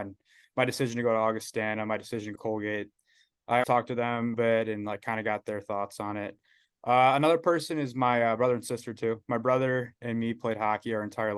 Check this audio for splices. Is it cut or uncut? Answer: cut